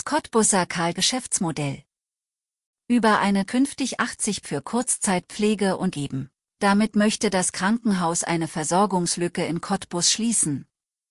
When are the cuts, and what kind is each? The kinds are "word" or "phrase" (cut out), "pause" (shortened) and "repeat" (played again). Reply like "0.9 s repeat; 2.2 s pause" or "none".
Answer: 0.9 s phrase; 3.5 s phrase; 4.4 s word; 5.9 s word; 6.4 s pause